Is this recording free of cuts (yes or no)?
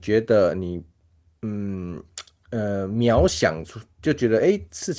yes